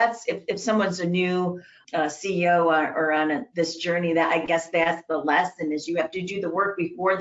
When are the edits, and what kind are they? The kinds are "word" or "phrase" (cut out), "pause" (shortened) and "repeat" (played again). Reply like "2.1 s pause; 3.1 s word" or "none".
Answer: 1.8 s word